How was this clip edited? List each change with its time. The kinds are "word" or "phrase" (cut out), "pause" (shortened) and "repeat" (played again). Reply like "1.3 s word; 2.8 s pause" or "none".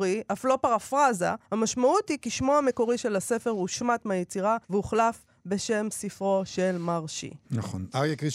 1.4 s pause; 4.6 s pause